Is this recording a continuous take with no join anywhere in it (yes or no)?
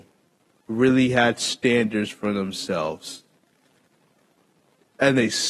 yes